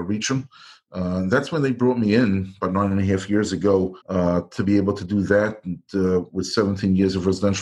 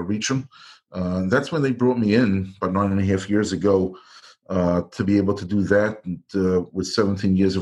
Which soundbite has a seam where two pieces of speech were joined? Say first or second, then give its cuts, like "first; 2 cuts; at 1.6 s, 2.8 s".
first; 1 cut; at 4.0 s